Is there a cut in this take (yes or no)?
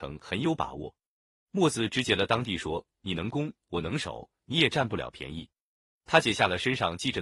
no